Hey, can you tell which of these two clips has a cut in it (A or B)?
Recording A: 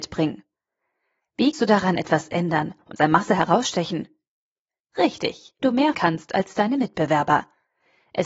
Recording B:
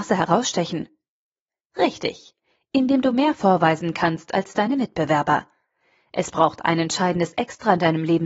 A